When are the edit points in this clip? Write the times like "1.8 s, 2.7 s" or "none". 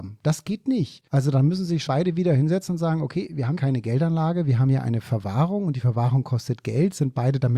1.1 s, 1.9 s, 3.6 s